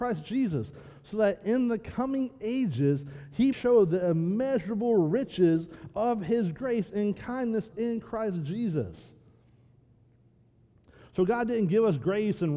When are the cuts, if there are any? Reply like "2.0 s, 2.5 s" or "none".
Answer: 3.5 s, 7.7 s